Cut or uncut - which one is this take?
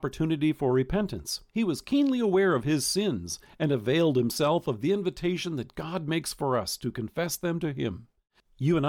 cut